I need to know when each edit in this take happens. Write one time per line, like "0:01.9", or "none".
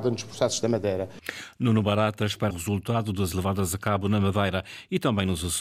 0:02.5
0:03.3

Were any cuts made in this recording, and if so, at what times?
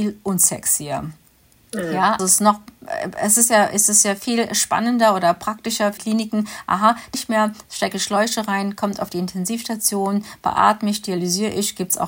0:02.2
0:06.0
0:07.1

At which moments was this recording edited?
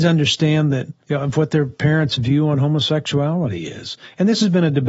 0:01.0

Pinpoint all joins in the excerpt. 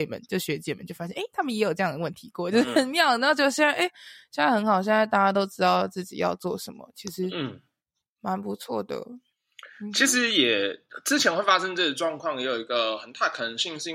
none

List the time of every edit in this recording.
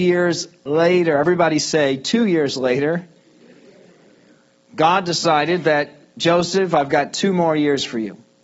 none

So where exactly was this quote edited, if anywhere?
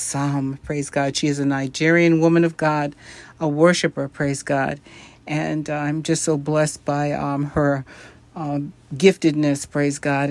none

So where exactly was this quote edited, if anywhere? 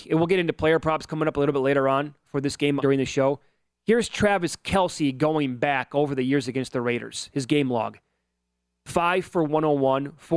0:02.8

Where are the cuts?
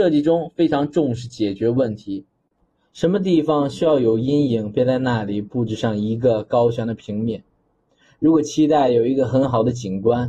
none

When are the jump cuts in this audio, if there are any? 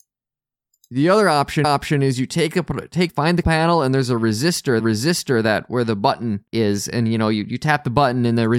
0:01.6
0:03.1
0:03.4
0:04.8
0:06.5

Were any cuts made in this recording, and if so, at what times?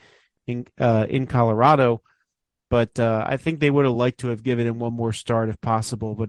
none

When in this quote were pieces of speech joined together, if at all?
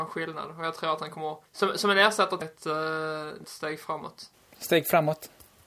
0:01.5
0:02.4
0:03.4

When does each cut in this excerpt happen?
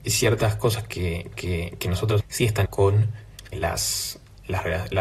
0:01.3
0:02.2
0:02.7
0:03.5

